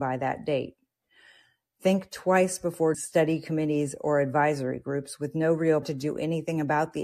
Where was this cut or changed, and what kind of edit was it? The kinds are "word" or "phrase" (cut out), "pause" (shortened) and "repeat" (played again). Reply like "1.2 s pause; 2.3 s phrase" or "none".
2.9 s word; 5.8 s word